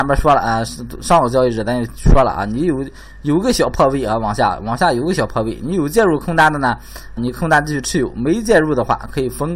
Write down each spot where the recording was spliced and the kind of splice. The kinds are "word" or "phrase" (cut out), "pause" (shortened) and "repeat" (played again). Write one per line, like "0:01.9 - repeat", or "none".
0:07.2 - word